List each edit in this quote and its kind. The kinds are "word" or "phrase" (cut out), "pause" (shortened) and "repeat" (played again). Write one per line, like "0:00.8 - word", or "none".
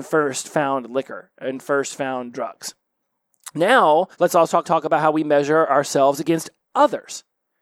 0:04.1 - pause
0:04.6 - word